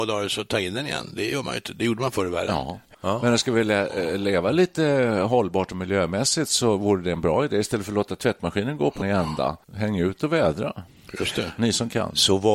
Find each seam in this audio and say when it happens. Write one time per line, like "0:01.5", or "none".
0:09.0
0:09.6

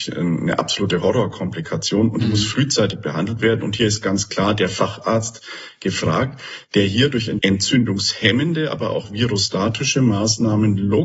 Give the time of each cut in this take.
0:07.4

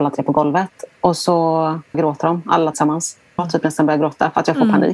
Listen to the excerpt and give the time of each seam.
0:01.9
0:02.7
0:03.4

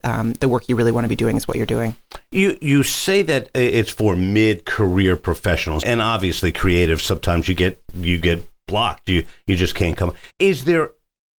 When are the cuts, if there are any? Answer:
0:05.8
0:10.3

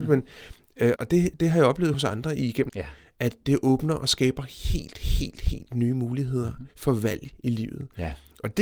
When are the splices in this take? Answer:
0:01.0
0:01.9
0:02.7
0:03.4
0:06.7

